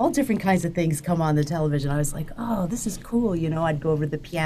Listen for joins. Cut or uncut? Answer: uncut